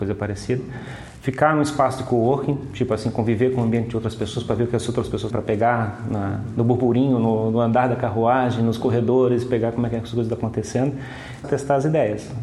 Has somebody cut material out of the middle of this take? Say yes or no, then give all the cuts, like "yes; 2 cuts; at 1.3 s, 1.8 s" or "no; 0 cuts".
yes; 2 cuts; at 5.3 s, 11.4 s